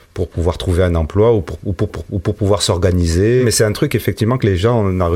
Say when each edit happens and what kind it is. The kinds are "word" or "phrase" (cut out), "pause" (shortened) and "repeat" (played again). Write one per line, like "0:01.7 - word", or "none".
0:01.9 - repeat